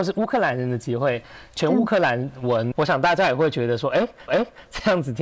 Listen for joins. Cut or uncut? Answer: cut